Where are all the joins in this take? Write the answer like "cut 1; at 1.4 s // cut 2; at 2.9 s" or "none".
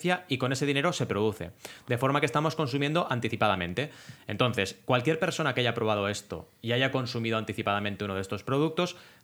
none